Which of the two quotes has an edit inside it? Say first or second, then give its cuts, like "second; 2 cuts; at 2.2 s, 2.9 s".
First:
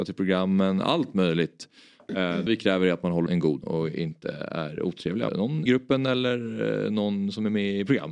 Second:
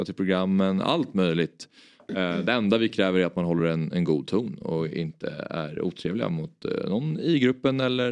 first; 5 cuts; at 2.5 s, 3.3 s, 3.6 s, 5.3 s, 5.7 s